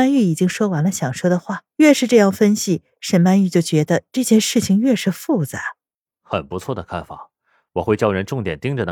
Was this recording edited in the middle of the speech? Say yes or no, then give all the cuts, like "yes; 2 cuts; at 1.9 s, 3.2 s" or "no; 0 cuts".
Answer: yes; 2 cuts; at 1.7 s, 6.0 s